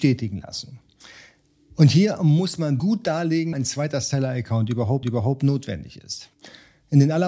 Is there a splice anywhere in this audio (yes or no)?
yes